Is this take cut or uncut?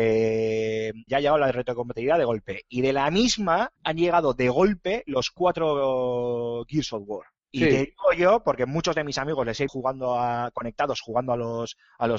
cut